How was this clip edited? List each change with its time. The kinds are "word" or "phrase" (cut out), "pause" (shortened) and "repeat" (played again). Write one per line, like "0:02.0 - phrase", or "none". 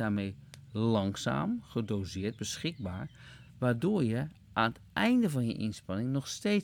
0:03.5 - pause